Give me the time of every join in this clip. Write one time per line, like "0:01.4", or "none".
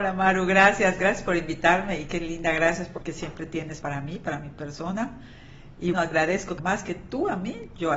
0:02.1
0:03.0
0:03.8
0:05.9
0:06.6